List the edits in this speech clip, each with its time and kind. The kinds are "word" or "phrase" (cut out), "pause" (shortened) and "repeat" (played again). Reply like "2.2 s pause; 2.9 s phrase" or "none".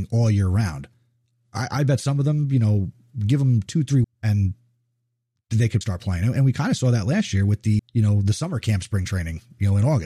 4.0 s word; 5.8 s word; 7.8 s word